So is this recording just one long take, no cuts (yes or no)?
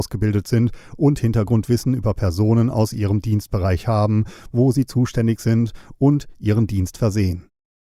yes